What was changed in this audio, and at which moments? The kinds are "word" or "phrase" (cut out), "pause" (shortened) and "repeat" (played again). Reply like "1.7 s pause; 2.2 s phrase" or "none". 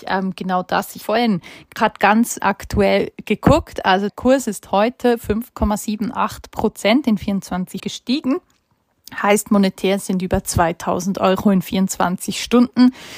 1.0 s word; 2.4 s word; 4.1 s word; 7.8 s word